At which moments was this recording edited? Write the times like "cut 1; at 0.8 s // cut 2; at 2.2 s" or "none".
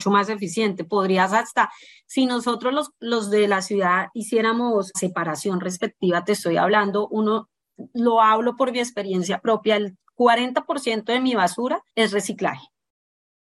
cut 1; at 4.9 s // cut 2; at 11.9 s